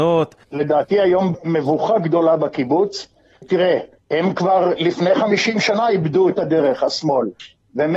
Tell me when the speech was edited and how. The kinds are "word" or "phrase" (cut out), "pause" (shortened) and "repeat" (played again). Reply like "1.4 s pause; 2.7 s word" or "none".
none